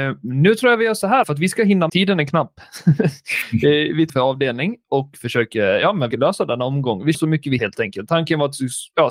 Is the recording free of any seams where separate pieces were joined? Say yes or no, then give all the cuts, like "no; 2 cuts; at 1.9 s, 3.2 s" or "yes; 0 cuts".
no; 6 cuts; at 1.2 s, 1.9 s, 4.1 s, 6.1 s, 7.1 s, 7.6 s